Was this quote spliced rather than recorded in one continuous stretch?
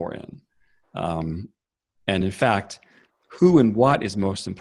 no; 0 cuts

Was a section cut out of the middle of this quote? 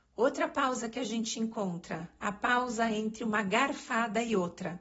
no; 0 cuts

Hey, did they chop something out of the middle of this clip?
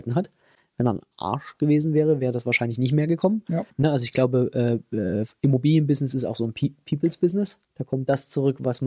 yes; 2 cuts; at 3.7 s, 7.6 s

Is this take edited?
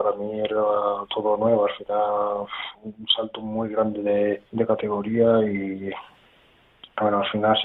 yes; 2 cuts; at 1.1 s, 4.5 s

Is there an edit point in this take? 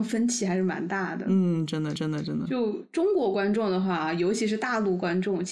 yes; 1 cut; at 2.0 s

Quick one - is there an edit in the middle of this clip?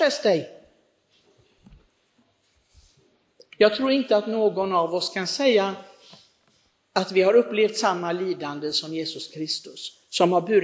no; 0 cuts

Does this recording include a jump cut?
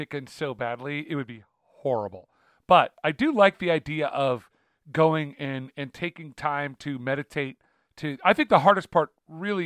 no; 0 cuts

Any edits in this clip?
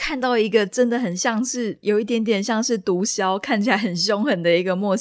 yes; 1 cut; at 1.8 s

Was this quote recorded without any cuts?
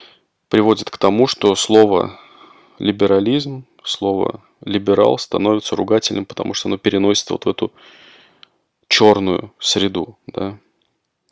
yes; 0 cuts

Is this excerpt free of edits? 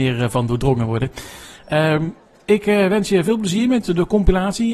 yes; 0 cuts

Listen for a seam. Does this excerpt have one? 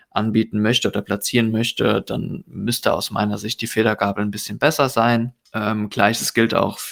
no; 0 cuts

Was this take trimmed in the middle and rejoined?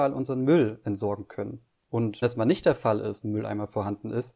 yes; 2 cuts; at 2.2 s, 3.2 s

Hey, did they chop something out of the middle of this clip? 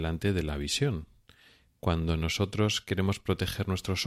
no; 0 cuts

